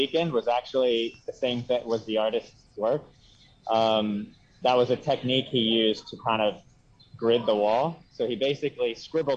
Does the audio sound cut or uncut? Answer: uncut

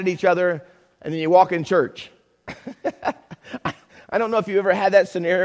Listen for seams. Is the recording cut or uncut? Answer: uncut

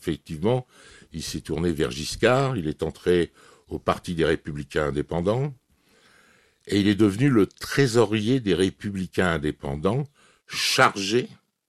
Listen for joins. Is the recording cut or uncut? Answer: uncut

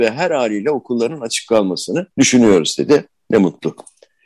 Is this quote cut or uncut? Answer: cut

